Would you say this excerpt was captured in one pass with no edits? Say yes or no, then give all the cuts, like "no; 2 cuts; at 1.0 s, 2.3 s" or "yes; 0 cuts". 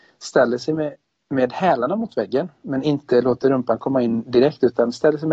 yes; 0 cuts